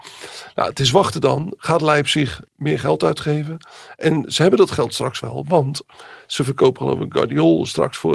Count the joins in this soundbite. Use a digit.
1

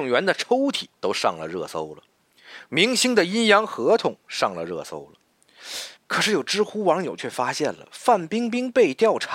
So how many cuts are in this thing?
2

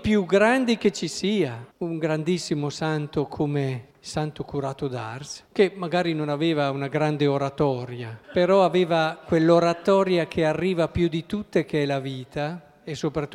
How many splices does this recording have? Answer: 4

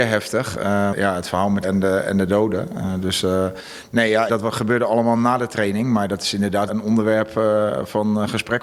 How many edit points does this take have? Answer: 4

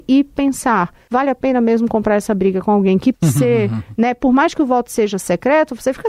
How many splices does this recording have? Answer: 1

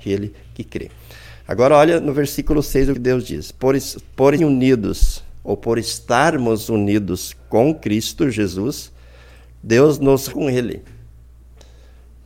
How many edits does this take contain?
4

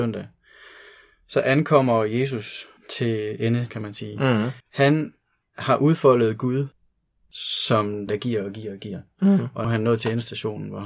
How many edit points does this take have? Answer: 4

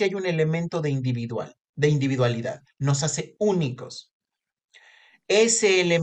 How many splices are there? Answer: 1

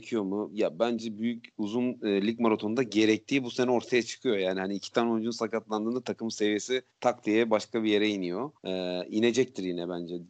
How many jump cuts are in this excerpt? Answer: 2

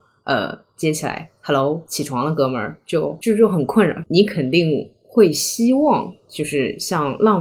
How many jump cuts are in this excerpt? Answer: 0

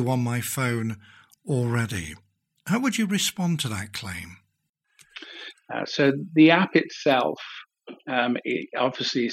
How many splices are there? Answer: 0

